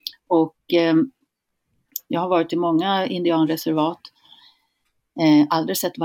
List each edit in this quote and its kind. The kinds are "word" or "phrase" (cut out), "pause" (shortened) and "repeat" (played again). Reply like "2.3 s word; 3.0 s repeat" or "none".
2.1 s phrase